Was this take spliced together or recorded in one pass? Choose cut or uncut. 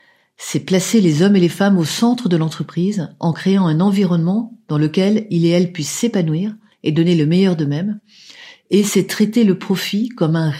uncut